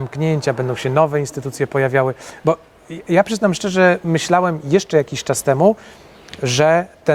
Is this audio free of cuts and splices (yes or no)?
yes